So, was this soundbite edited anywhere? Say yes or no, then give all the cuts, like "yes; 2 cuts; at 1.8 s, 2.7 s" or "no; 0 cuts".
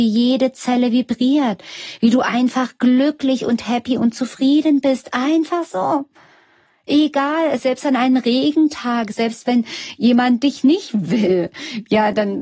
no; 0 cuts